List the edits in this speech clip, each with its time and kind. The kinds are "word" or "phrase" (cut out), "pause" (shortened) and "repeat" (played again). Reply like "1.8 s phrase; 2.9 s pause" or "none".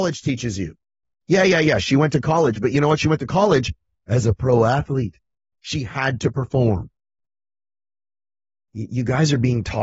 none